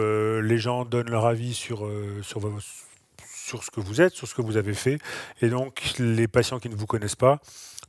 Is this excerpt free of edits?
yes; 0 cuts

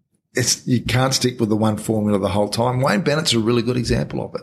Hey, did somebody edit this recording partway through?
no; 0 cuts

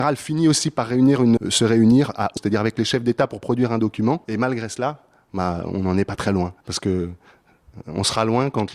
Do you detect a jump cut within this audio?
yes; 4 cuts; at 1.4 s, 2.4 s, 4.2 s, 6.6 s

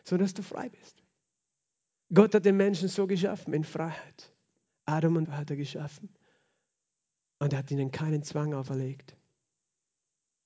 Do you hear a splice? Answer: yes; 1 cut; at 5.2 s

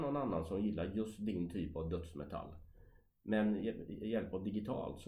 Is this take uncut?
yes; 0 cuts

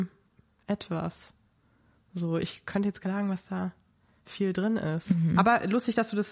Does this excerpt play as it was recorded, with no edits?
no; 1 cut; at 3.0 s

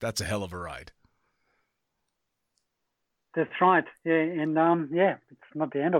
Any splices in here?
no; 0 cuts

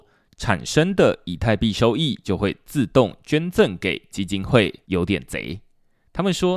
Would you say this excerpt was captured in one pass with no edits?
no; 2 cuts; at 4.1 s, 4.8 s

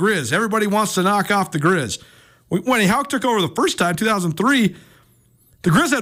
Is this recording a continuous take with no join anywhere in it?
yes; 0 cuts

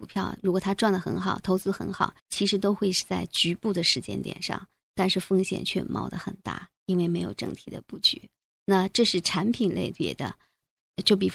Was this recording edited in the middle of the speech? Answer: yes; 2 cuts; at 2.2 s, 8.4 s

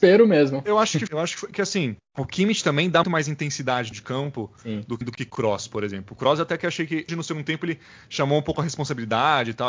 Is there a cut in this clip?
yes; 6 cuts; at 1.1 s, 2.0 s, 3.0 s, 3.9 s, 5.0 s, 7.1 s

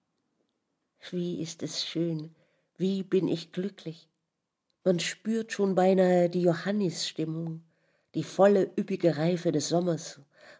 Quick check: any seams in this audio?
no; 0 cuts

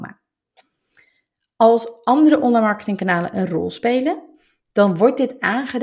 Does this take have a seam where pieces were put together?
no; 0 cuts

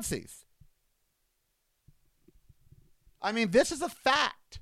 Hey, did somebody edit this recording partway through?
no; 0 cuts

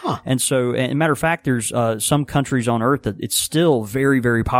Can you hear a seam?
no; 0 cuts

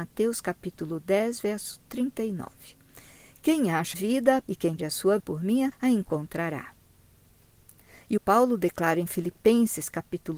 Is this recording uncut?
no; 6 cuts; at 3.9 s, 4.4 s, 4.8 s, 5.2 s, 5.7 s, 8.2 s

